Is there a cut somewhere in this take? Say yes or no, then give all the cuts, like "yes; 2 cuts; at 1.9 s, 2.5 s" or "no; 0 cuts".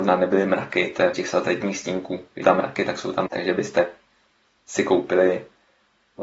yes; 3 cuts; at 1.1 s, 2.4 s, 3.3 s